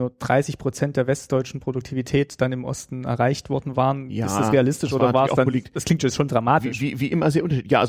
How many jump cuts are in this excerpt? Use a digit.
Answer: 0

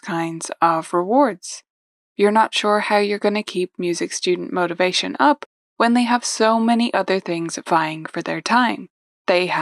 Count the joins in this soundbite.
0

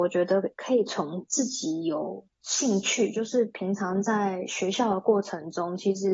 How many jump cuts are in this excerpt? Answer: 1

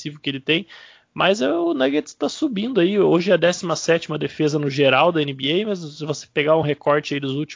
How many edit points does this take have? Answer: 0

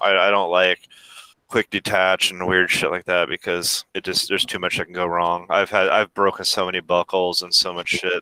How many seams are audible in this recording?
2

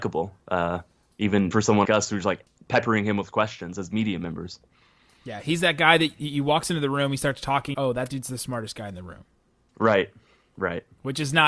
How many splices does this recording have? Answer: 3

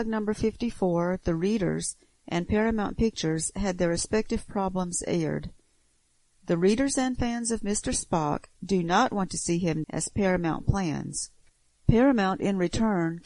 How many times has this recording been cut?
1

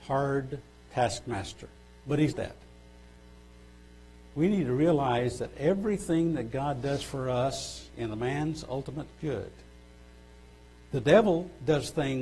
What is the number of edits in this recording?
3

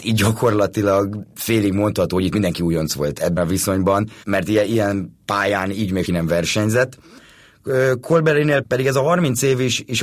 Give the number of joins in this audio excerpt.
4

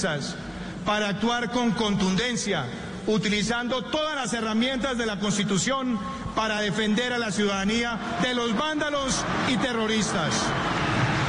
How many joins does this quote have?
0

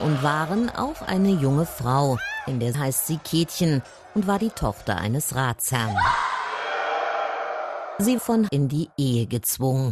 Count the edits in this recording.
3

